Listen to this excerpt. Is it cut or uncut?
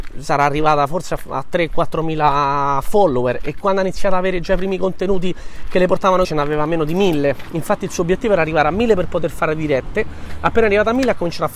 cut